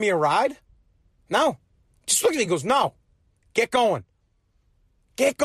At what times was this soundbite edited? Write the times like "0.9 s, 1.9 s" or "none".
none